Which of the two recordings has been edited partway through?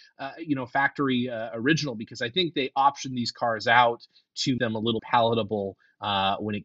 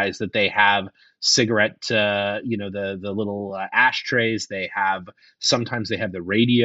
first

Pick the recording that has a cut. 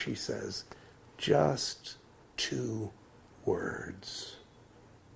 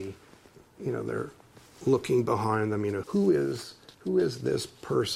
second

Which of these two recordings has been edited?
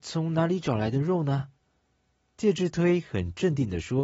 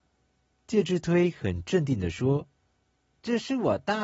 second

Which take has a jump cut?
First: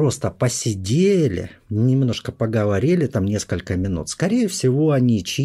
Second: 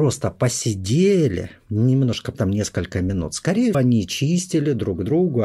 second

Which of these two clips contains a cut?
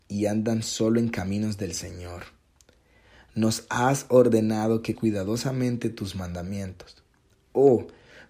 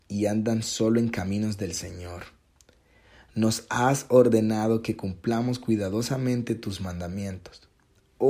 first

